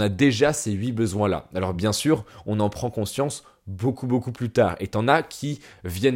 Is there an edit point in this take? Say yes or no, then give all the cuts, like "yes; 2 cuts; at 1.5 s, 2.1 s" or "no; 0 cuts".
no; 0 cuts